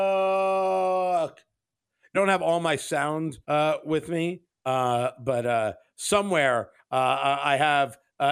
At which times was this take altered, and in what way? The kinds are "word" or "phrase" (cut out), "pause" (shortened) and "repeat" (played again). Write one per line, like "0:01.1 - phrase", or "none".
0:02.1 - phrase
0:03.4 - pause
0:04.5 - pause